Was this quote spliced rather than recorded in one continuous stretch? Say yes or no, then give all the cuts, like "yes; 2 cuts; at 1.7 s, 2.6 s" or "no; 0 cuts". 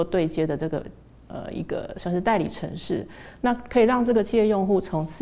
no; 0 cuts